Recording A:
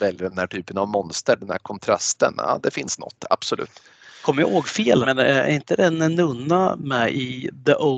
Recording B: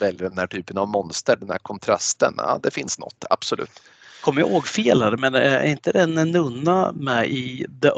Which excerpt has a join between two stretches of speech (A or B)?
A